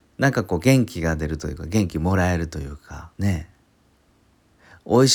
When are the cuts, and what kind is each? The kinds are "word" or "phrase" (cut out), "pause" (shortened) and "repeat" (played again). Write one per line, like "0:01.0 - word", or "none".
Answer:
0:03.1 - pause